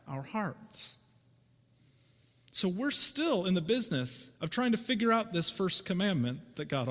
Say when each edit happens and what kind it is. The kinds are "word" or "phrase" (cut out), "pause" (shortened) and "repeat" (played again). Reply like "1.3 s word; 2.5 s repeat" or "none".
4.4 s pause